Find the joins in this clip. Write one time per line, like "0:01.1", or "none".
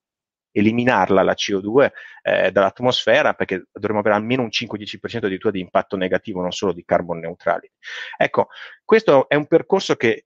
none